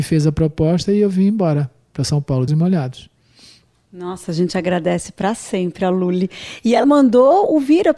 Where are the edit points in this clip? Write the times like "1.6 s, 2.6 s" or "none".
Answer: 2.5 s, 6.8 s